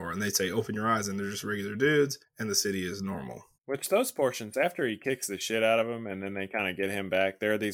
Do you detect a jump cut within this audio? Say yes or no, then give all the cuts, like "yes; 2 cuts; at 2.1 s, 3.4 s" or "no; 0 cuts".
yes; 2 cuts; at 2.2 s, 3.5 s